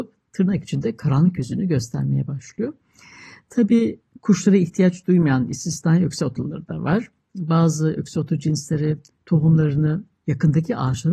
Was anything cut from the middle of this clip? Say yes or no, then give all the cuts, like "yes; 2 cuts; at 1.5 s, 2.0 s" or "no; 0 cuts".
no; 0 cuts